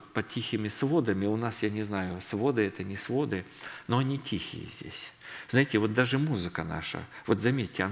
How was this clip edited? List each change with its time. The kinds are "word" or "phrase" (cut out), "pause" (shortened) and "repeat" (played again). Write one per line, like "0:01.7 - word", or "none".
none